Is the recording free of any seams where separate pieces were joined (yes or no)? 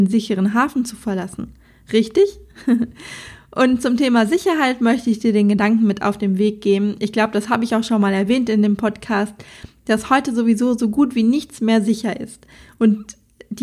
yes